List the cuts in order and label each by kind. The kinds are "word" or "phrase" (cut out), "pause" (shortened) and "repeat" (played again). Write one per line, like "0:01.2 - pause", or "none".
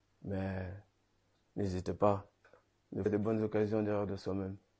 0:01.3 - pause
0:03.1 - phrase